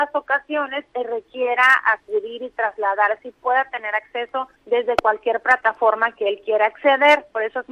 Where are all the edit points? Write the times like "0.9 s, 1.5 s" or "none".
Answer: 4.6 s